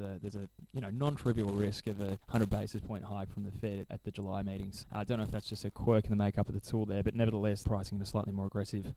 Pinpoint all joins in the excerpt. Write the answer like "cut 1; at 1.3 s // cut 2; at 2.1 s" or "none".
cut 1; at 2.2 s // cut 2; at 3.9 s // cut 3; at 4.8 s // cut 4; at 7.6 s